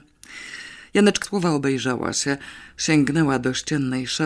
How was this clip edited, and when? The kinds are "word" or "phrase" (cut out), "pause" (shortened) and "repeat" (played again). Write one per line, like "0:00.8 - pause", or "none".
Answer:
0:01.2 - word